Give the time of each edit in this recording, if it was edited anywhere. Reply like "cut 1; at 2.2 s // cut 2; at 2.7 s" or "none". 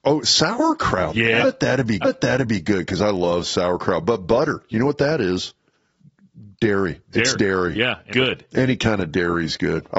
cut 1; at 1.4 s // cut 2; at 2.0 s // cut 3; at 6.5 s // cut 4; at 8.1 s